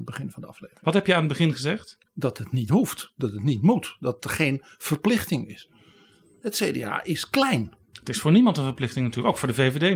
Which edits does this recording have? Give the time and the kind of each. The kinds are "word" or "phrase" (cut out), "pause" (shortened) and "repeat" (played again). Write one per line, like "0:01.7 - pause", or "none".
none